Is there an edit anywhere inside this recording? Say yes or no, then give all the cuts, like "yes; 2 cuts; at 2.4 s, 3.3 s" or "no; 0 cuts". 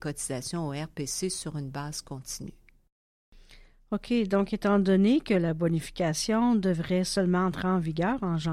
no; 0 cuts